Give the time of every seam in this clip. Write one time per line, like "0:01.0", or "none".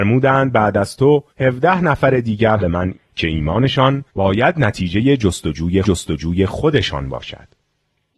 0:01.3
0:02.6
0:02.9
0:04.1
0:05.8